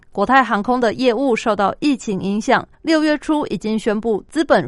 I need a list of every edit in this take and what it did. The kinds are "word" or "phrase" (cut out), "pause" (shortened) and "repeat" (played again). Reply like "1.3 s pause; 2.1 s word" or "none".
2.7 s pause